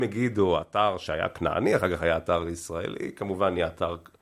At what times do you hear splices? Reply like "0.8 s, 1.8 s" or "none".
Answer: none